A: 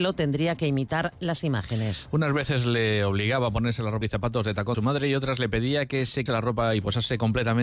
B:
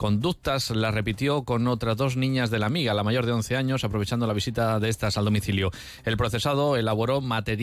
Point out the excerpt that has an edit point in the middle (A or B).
A